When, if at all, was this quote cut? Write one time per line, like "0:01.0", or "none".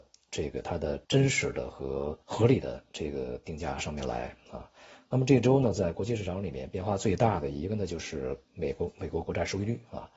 0:01.0
0:02.2